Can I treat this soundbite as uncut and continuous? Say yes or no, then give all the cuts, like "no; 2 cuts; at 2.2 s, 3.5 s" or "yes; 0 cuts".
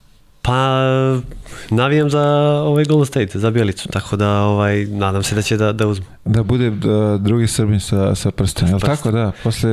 yes; 0 cuts